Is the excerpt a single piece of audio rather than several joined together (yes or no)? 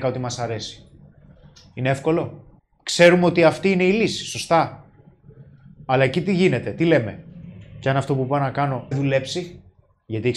no